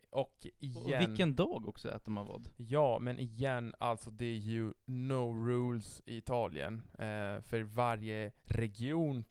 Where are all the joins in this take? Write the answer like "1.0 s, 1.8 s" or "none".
8.4 s